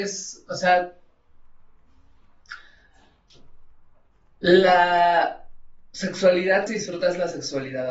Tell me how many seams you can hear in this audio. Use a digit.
1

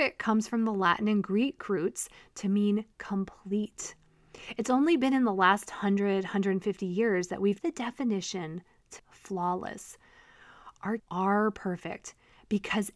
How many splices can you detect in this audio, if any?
3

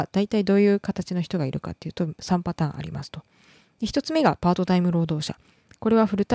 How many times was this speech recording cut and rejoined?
0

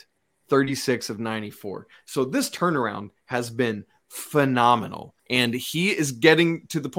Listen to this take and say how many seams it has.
1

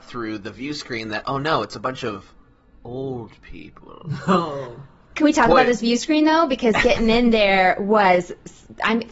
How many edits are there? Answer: 0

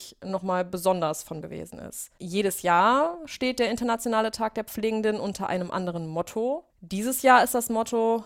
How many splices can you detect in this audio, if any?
2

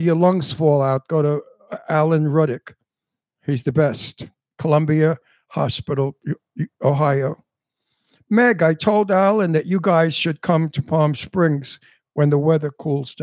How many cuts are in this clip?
0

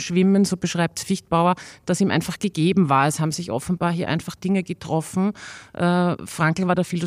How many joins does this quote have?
0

